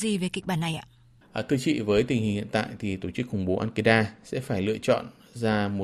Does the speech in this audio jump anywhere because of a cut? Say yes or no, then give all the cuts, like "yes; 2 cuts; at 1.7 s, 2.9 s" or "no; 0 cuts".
no; 0 cuts